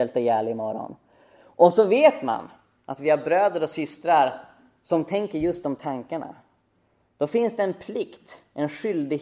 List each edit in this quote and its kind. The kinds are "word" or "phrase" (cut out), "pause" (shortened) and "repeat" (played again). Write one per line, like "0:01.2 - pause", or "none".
none